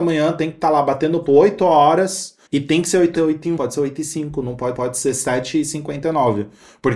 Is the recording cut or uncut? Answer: cut